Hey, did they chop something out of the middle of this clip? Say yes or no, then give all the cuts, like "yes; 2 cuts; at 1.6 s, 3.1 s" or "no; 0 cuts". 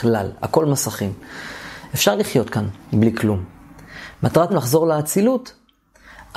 yes; 1 cut; at 4.5 s